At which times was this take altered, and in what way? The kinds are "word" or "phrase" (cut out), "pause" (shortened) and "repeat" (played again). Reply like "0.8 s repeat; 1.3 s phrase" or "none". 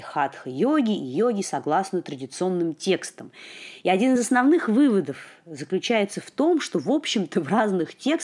none